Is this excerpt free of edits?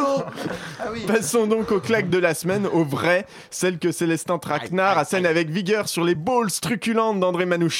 yes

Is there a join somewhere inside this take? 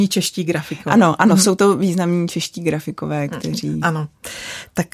no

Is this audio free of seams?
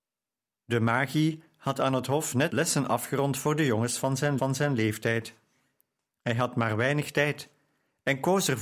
no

